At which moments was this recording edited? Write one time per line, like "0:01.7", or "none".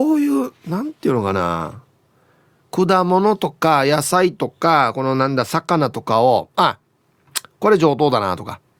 none